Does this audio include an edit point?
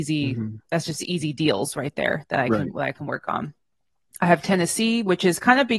no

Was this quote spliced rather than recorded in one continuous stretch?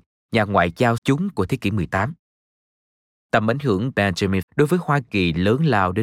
yes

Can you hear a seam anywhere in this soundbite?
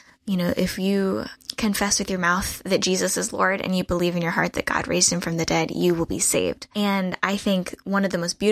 no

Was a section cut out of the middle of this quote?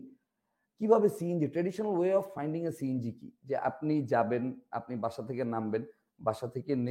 no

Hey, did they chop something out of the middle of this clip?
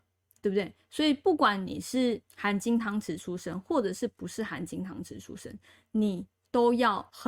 yes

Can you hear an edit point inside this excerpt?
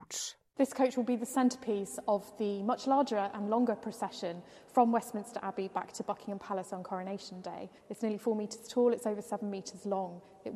yes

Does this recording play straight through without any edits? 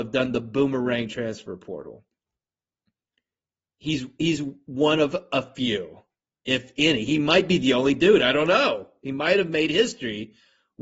yes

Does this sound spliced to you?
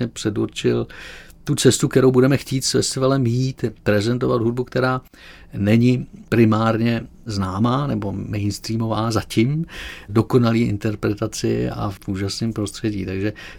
no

